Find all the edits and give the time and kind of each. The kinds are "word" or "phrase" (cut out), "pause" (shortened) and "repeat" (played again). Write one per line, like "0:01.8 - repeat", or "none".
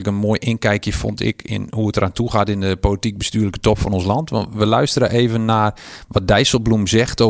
none